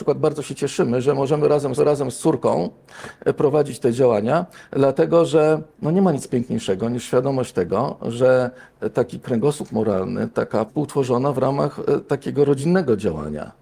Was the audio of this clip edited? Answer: yes; 3 cuts; at 1.8 s, 5.7 s, 10.7 s

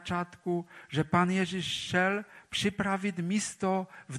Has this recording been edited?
no; 0 cuts

